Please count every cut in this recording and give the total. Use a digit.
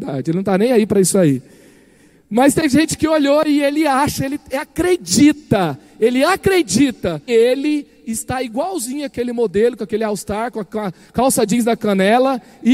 1